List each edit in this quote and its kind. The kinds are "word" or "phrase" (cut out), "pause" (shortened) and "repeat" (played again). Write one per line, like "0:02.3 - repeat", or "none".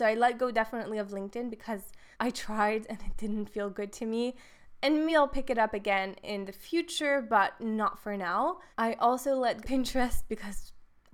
0:02.1 - pause
0:05.1 - word
0:08.7 - pause
0:09.6 - phrase